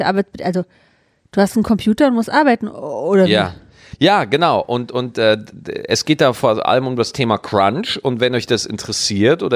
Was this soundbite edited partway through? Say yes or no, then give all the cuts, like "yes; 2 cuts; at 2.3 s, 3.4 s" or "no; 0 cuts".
no; 0 cuts